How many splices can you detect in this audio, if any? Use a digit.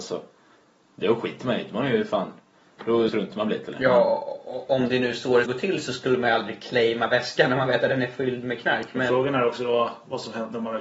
2